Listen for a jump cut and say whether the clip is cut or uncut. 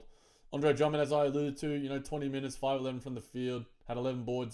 uncut